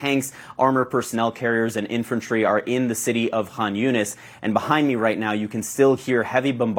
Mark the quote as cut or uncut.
uncut